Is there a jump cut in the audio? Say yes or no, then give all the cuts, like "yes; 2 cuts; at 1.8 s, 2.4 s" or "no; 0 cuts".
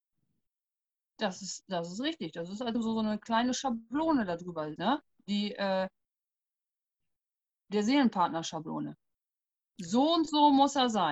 yes; 2 cuts; at 2.7 s, 4.8 s